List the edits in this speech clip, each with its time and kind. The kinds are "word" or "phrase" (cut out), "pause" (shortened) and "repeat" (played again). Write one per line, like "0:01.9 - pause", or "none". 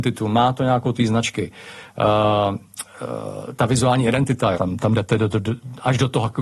0:00.9 - word
0:04.5 - word

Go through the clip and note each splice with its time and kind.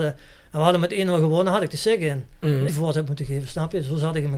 0:02.7 - phrase

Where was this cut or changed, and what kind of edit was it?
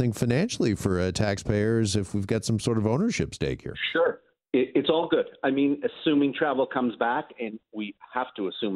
none

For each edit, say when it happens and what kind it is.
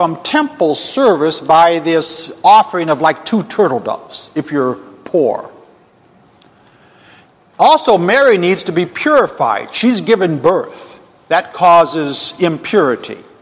none

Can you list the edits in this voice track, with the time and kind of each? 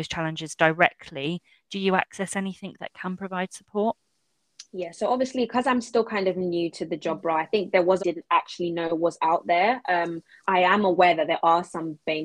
0:08.0 - phrase
0:10.4 - word

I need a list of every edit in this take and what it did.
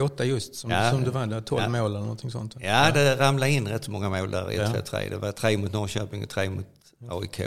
none

